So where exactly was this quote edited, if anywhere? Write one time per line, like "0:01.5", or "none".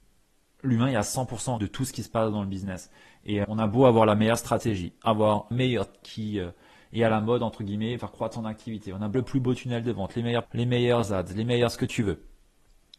0:01.6
0:03.4
0:05.5
0:06.0
0:08.0
0:09.1
0:10.4